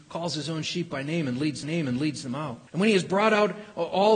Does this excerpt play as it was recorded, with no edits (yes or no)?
no